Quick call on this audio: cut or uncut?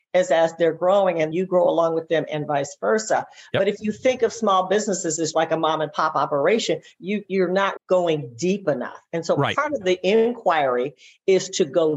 cut